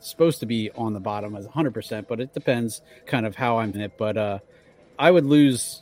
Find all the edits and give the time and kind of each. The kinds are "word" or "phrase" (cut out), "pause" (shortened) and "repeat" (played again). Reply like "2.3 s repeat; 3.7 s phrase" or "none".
3.0 s word; 3.7 s word; 4.9 s word